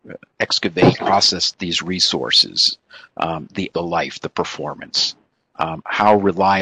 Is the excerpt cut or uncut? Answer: cut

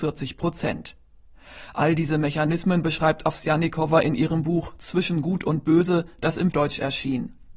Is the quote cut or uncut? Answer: cut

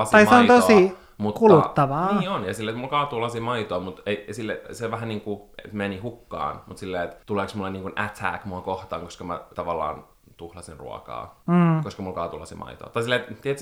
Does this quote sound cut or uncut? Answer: cut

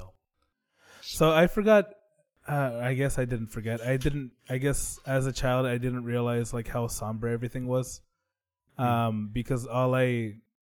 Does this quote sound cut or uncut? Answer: uncut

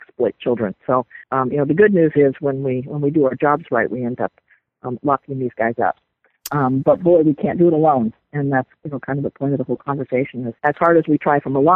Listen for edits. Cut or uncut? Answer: cut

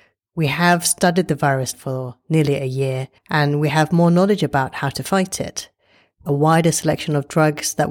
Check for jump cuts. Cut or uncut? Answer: cut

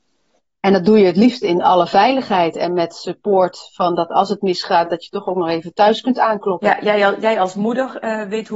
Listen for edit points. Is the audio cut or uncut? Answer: uncut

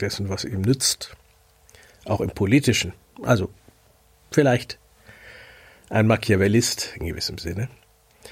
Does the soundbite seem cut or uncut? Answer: uncut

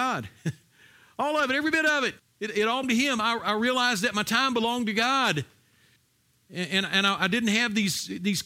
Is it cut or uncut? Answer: cut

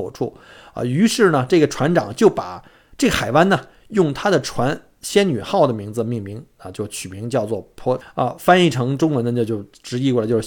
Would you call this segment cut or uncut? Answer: cut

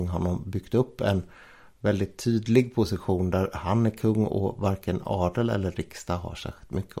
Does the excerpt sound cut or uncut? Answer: uncut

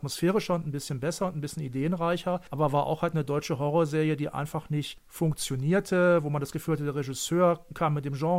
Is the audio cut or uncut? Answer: uncut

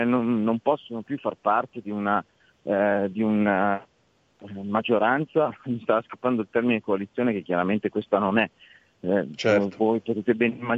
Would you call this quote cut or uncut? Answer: uncut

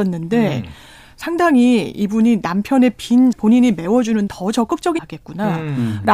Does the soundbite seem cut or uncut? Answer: cut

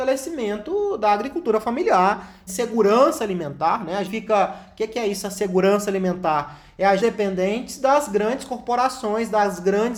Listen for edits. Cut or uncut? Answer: cut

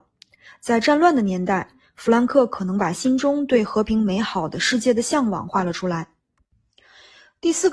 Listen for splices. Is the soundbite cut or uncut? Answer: uncut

